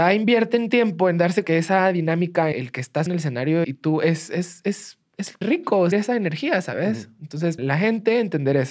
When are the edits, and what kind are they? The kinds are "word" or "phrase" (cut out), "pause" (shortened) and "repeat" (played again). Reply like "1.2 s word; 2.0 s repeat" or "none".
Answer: 1.4 s word; 2.5 s word; 3.1 s word; 3.6 s word; 5.4 s word; 5.9 s word; 7.6 s word